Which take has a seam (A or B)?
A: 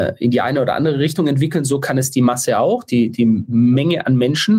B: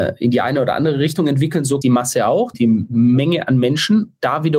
B